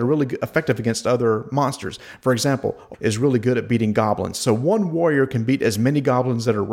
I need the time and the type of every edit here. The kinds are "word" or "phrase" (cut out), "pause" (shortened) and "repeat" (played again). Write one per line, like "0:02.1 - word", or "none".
0:02.9 - word

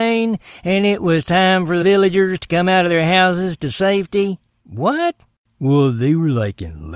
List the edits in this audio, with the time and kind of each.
0:01.8 - word

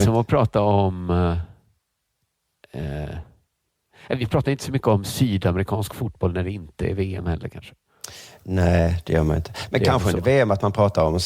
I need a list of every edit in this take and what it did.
none

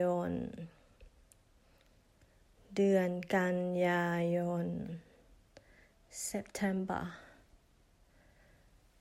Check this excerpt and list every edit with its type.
none

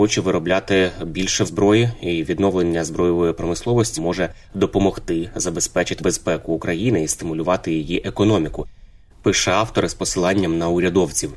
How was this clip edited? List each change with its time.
0:01.4 - word
0:04.0 - word
0:06.0 - word

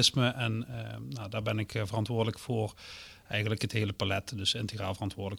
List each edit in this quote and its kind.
none

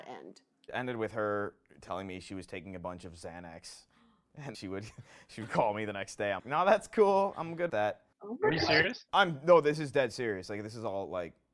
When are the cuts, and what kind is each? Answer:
0:04.5 - word
0:06.4 - word
0:07.7 - word
0:08.1 - pause
0:09.1 - pause

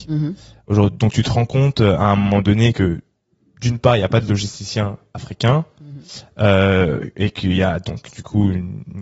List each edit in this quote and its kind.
none

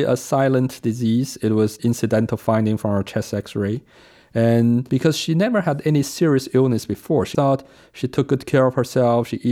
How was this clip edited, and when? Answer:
0:07.3 - word

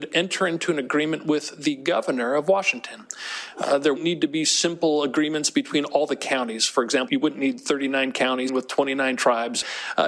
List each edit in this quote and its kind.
0:04.0 - word
0:07.1 - word
0:08.5 - word

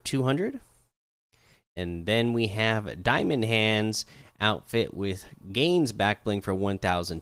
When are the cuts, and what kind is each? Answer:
none

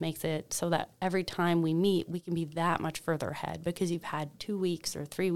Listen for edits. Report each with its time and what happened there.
none

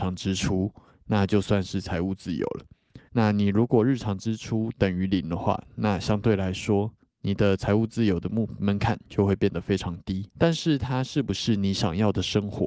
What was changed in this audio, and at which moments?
0:03.1 - pause
0:10.3 - pause

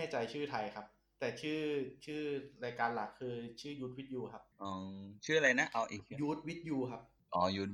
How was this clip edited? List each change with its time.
0:04.5 - pause

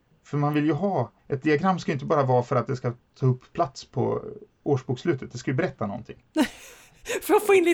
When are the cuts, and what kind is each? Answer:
0:01.2 - pause

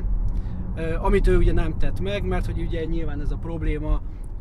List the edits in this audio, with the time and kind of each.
none

